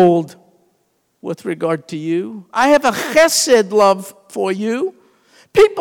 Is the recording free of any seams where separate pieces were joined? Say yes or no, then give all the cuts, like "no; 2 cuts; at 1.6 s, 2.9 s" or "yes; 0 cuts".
no; 1 cut; at 1.0 s